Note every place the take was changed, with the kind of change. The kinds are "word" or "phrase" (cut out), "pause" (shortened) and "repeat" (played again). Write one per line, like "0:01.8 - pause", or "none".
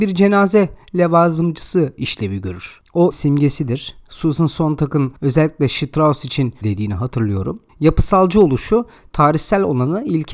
0:03.1 - word
0:05.2 - pause
0:06.6 - phrase
0:07.7 - pause